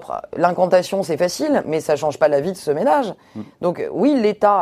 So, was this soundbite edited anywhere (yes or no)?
no